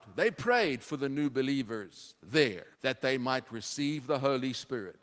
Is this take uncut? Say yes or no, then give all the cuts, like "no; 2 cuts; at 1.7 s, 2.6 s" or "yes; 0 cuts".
no; 1 cut; at 2.7 s